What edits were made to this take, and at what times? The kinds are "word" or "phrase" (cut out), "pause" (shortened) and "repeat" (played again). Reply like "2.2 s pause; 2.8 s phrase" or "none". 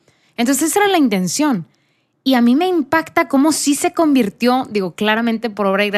none

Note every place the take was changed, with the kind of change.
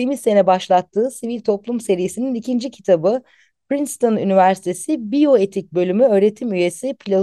none

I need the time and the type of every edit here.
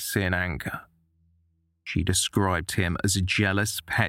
none

